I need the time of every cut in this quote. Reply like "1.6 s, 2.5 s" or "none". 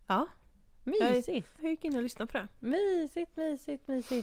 1.6 s